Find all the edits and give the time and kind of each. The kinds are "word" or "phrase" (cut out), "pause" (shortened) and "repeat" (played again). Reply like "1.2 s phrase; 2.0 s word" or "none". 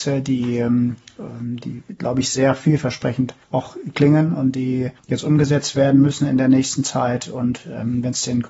3.4 s pause; 5.0 s pause